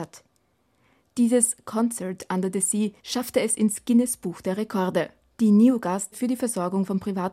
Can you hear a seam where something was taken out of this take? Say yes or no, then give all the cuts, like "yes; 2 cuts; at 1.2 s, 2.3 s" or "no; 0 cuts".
yes; 3 cuts; at 3.0 s, 5.2 s, 6.1 s